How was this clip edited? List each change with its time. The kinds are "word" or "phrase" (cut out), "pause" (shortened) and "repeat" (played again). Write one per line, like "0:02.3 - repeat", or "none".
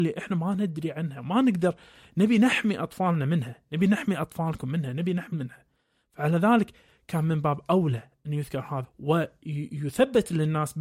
0:05.3 - word
0:08.8 - word